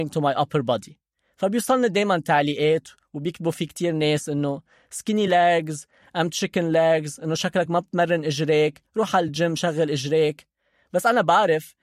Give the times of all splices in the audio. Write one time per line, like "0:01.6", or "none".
none

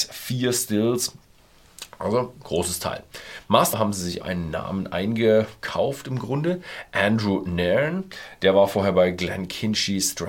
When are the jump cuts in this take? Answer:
0:03.7
0:04.2

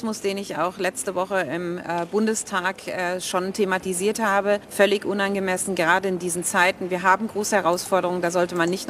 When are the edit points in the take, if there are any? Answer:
0:04.6

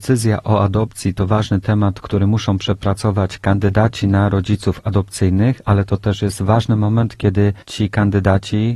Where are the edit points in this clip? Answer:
0:07.6

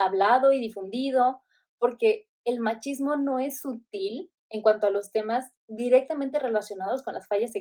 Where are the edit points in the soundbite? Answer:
0:04.4

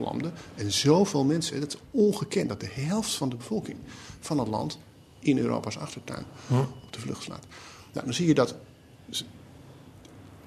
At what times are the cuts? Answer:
none

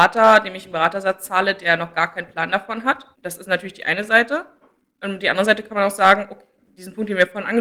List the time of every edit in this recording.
0:03.1

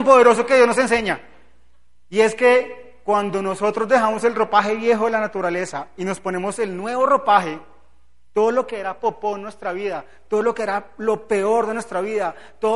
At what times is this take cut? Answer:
none

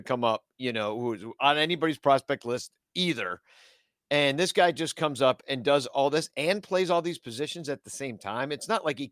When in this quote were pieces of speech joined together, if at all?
none

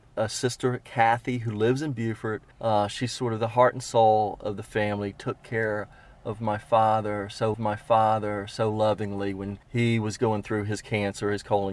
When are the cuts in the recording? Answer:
0:02.5
0:07.5
0:09.6

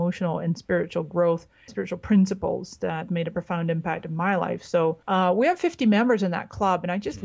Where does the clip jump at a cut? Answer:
0:01.7
0:03.1
0:05.0

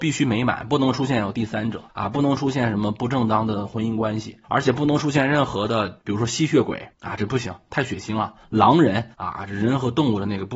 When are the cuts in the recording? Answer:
0:01.9
0:04.4
0:06.0
0:06.9
0:09.1

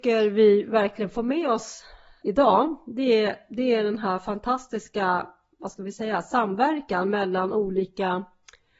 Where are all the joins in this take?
0:02.2

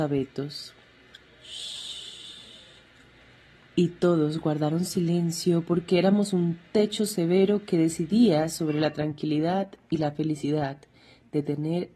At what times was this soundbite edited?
none

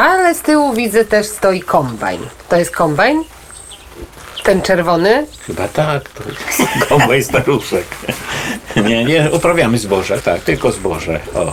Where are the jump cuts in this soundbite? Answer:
0:10.2

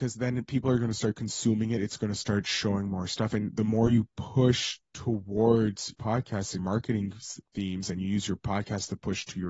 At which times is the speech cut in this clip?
0:05.9
0:06.6

